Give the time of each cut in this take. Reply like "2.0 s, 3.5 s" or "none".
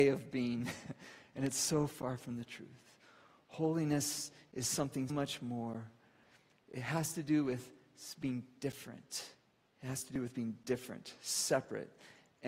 5.1 s, 9.5 s

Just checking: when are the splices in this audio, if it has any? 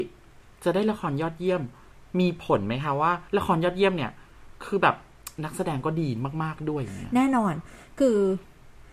1.9 s, 3.3 s

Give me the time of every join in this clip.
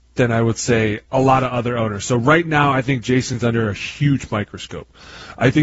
1.0 s

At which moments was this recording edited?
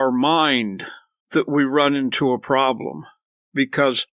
none

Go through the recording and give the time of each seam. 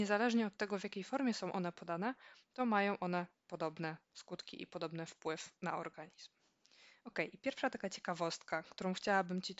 none

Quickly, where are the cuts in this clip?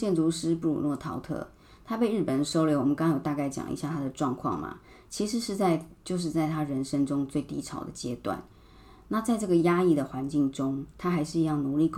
none

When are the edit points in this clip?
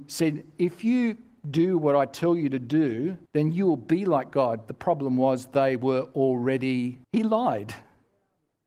3.3 s, 7.0 s

